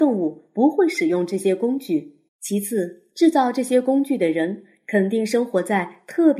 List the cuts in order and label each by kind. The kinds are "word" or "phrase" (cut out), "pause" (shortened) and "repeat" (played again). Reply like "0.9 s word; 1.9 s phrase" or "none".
2.3 s pause; 3.1 s pause